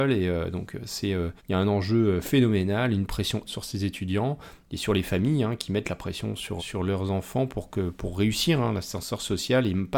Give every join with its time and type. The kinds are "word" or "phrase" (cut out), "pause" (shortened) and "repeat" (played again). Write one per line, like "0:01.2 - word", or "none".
0:01.4 - pause
0:03.5 - word
0:06.6 - word